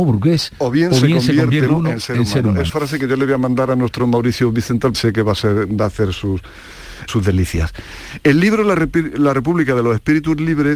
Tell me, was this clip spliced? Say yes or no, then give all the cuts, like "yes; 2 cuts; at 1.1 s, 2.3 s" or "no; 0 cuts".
yes; 5 cuts; at 1.7 s, 2.7 s, 4.0 s, 4.9 s, 7.1 s